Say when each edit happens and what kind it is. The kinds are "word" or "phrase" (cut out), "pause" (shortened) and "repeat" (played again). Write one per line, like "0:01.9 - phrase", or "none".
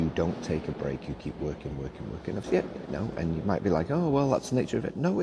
0:02.4 - word